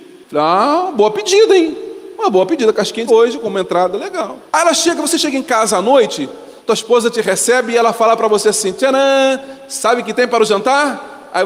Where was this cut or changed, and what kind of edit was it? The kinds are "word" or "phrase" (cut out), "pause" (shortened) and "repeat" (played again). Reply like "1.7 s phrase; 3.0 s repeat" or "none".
3.1 s word; 4.5 s pause; 6.6 s pause